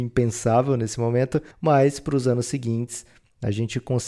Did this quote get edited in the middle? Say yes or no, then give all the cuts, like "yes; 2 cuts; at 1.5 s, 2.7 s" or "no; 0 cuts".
yes; 1 cut; at 1.5 s